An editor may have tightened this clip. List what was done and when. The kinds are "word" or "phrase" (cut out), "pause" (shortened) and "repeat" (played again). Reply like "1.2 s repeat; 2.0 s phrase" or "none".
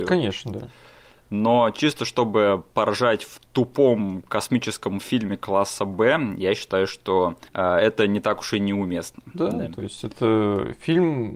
7.5 s pause